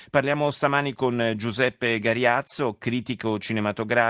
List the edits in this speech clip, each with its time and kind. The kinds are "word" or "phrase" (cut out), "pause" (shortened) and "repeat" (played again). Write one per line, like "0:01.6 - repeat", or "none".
none